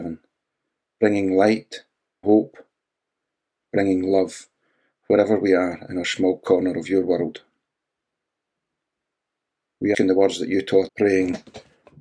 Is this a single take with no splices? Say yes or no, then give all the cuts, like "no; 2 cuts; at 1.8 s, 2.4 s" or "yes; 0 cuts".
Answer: no; 3 cuts; at 2.2 s, 9.9 s, 10.9 s